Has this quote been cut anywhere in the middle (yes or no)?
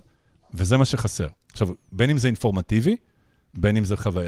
no